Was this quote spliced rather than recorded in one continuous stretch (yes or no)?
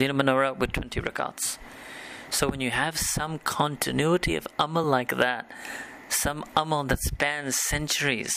no